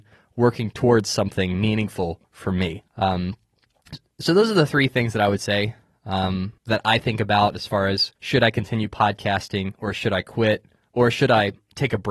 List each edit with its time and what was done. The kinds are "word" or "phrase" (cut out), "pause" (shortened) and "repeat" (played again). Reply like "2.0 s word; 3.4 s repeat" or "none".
2.9 s pause; 6.6 s pause; 8.2 s pause